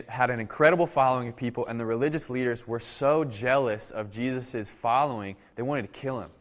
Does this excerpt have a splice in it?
no; 0 cuts

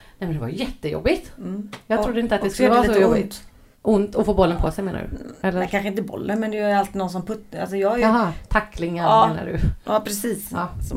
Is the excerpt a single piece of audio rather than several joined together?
no; 1 cut; at 3.7 s

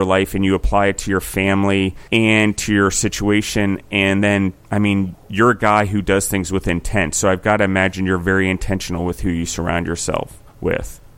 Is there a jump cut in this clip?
yes; 3 cuts; at 2.1 s, 4.6 s, 5.2 s

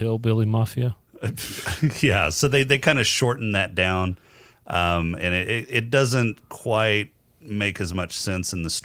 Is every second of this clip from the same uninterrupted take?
yes; 0 cuts

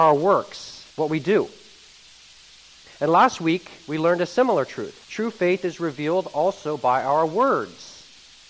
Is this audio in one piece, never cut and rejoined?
no; 2 cuts; at 0.9 s, 5.0 s

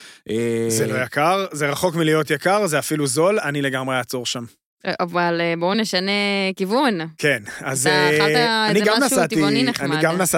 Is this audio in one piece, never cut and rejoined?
yes; 0 cuts

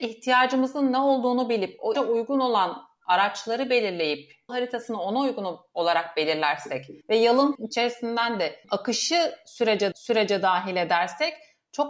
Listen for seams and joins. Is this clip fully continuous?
no; 6 cuts; at 1.9 s, 4.5 s, 7.0 s, 7.5 s, 8.6 s, 9.9 s

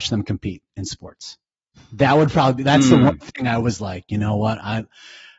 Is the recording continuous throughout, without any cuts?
yes; 0 cuts

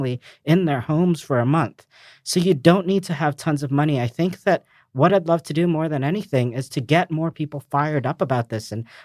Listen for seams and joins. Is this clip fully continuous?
yes; 0 cuts

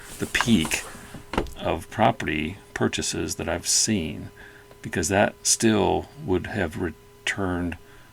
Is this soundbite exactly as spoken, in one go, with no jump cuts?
yes; 0 cuts

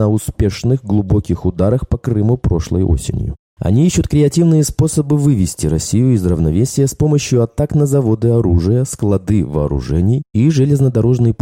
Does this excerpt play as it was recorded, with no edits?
yes; 0 cuts

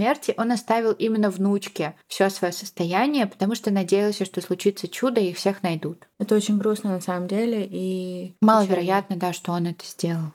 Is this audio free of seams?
no; 3 cuts; at 2.0 s, 6.1 s, 8.4 s

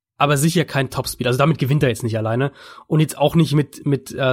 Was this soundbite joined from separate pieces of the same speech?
no; 0 cuts

